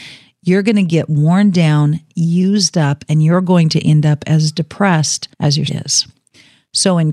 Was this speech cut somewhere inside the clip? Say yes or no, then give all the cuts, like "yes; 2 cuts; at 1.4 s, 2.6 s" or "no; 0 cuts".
yes; 2 cuts; at 5.3 s, 5.7 s